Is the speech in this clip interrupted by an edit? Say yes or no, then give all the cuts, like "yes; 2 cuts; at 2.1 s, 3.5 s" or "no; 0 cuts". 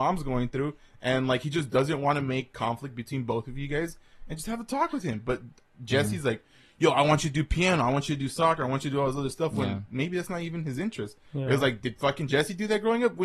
no; 0 cuts